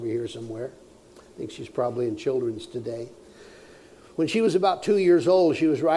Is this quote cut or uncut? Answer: uncut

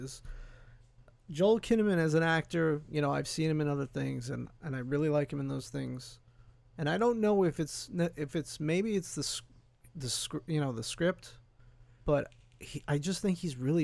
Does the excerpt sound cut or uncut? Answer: uncut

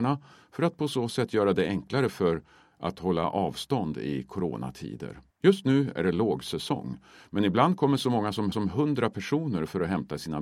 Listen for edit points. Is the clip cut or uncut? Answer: cut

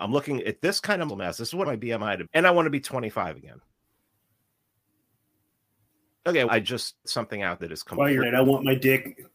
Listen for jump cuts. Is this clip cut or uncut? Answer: cut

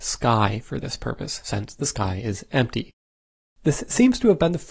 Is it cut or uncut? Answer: uncut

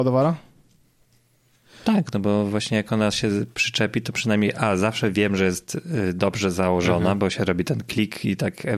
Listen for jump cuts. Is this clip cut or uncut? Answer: uncut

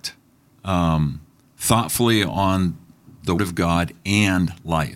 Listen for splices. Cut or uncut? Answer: cut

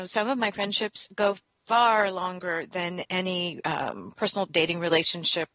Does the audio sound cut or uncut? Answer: uncut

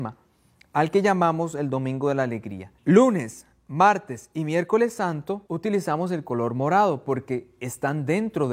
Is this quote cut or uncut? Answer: cut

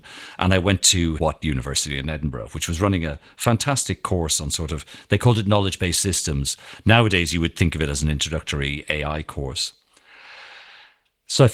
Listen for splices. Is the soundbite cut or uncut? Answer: cut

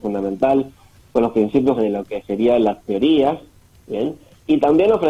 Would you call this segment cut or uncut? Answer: cut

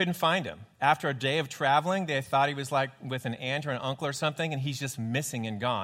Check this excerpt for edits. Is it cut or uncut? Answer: uncut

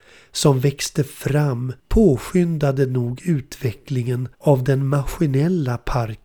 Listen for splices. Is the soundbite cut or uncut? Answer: cut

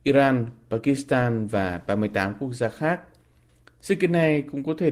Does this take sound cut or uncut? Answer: uncut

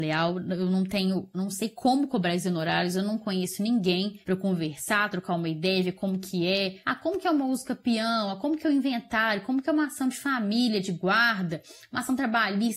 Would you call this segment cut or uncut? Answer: uncut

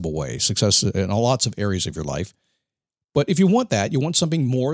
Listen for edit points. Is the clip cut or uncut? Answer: uncut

